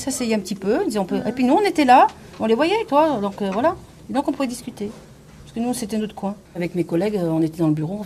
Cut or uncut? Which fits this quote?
cut